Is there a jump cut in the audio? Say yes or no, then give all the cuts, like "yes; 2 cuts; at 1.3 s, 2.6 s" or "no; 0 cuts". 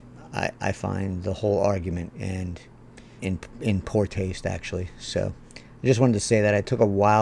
yes; 2 cuts; at 2.1 s, 3.2 s